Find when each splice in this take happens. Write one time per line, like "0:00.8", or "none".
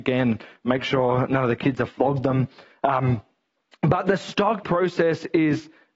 0:04.6